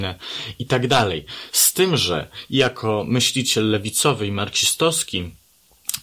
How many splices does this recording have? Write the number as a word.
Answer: zero